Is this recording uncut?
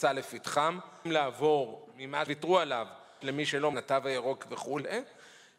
no; 4 cuts; at 1.0 s, 2.3 s, 3.2 s, 3.7 s

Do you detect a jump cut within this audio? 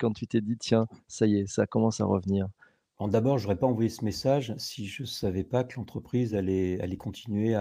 no; 0 cuts

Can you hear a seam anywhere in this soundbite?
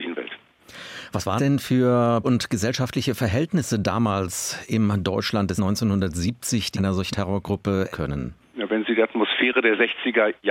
yes; 6 cuts; at 1.4 s, 2.2 s, 5.6 s, 6.7 s, 7.1 s, 7.9 s

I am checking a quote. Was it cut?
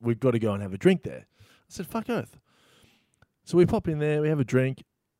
no; 0 cuts

